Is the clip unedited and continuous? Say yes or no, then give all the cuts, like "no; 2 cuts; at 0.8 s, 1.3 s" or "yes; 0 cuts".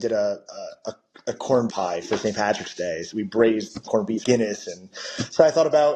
no; 5 cuts; at 1.7 s, 2.0 s, 3.1 s, 3.9 s, 4.2 s